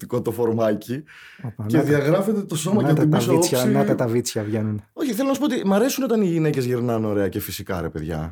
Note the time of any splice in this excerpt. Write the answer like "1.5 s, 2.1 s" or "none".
none